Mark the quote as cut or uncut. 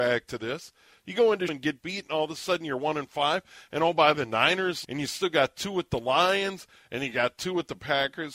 cut